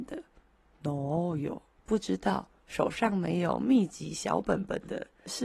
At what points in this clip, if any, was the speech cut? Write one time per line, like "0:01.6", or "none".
0:01.8